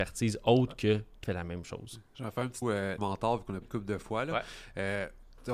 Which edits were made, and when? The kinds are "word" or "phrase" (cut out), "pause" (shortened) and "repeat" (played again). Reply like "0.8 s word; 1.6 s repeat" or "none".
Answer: 1.2 s phrase; 2.6 s word; 3.0 s phrase; 3.6 s word